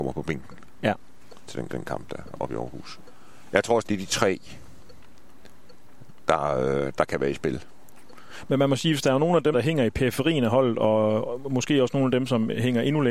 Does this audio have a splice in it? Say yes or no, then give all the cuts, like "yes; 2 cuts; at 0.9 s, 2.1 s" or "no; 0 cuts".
yes; 3 cuts; at 1.7 s, 3.8 s, 9.5 s